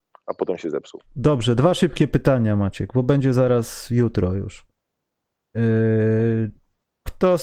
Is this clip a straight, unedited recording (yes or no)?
yes